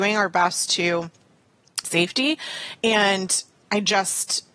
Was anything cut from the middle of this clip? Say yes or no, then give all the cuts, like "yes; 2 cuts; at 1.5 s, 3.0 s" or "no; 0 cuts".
yes; 1 cut; at 1.8 s